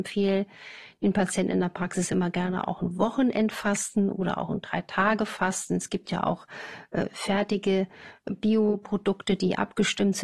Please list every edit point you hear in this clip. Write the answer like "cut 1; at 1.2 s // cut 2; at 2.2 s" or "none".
none